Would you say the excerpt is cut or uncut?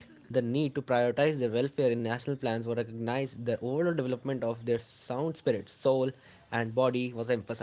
uncut